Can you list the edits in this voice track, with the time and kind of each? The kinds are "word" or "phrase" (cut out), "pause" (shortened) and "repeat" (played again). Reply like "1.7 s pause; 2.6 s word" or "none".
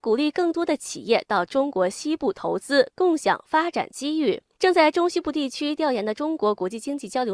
4.5 s pause